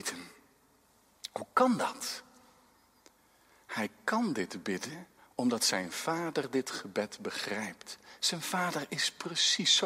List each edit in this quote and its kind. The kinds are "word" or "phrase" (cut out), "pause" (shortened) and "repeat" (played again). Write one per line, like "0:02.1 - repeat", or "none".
0:05.2 - pause

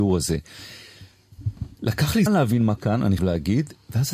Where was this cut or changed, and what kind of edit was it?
0:02.3 - word
0:02.8 - word
0:03.2 - word

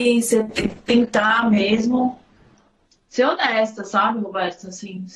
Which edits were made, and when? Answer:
none

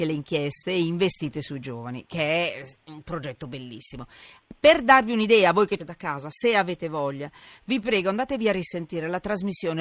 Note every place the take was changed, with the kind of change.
0:05.8 - phrase

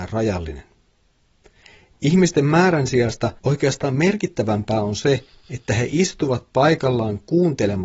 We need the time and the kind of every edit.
0:03.4 - pause

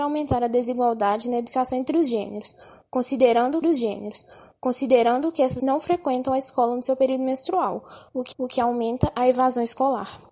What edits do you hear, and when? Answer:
0:03.6 - repeat
0:05.6 - word
0:08.3 - repeat

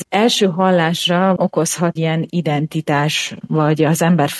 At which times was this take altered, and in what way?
0:01.4 - word
0:02.0 - word
0:03.4 - word

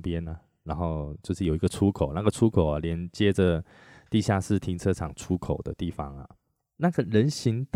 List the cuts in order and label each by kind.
none

